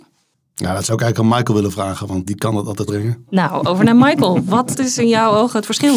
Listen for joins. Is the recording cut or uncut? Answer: cut